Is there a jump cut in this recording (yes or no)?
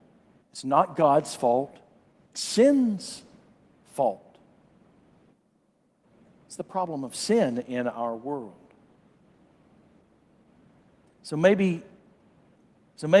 yes